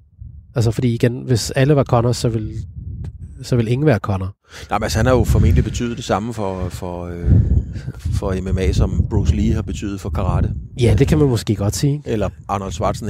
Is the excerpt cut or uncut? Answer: uncut